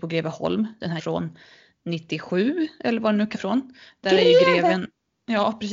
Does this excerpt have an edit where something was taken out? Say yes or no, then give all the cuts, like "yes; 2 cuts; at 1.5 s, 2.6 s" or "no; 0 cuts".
yes; 2 cuts; at 1.0 s, 3.3 s